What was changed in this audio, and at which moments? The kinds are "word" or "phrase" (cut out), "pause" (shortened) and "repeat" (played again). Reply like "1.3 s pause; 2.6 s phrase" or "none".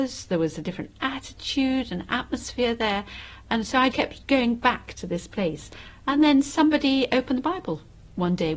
3.9 s word